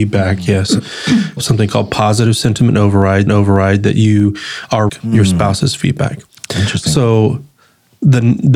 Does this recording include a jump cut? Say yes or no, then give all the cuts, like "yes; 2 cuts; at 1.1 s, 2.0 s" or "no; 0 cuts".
yes; 3 cuts; at 1.4 s, 3.3 s, 4.9 s